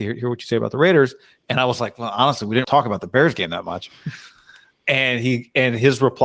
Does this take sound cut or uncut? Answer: cut